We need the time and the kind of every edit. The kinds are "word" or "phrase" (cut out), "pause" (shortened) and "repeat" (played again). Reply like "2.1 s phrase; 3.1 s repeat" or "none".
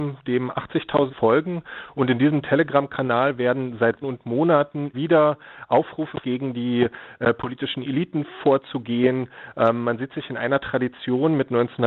1.1 s word; 4.0 s word; 4.9 s word; 6.2 s word